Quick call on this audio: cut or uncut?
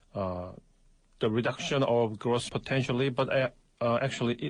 cut